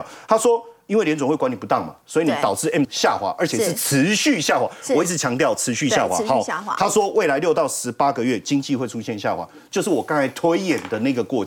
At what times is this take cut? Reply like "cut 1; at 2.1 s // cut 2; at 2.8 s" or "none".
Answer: cut 1; at 2.8 s